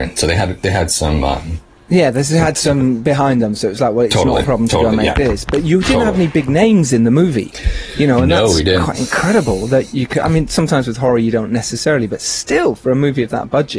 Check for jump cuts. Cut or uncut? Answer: uncut